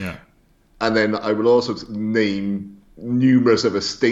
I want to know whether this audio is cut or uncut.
uncut